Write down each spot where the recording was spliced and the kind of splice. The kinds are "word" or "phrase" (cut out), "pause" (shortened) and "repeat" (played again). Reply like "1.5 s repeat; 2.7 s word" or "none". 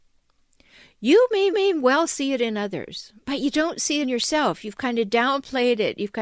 1.5 s repeat; 4.0 s phrase